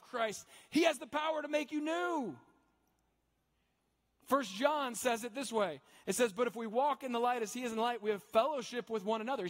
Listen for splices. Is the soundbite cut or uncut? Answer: uncut